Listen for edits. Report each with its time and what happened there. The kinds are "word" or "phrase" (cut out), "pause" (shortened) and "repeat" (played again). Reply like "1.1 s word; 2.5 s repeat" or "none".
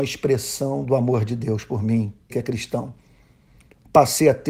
2.3 s phrase